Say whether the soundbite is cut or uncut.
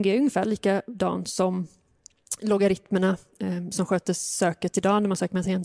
uncut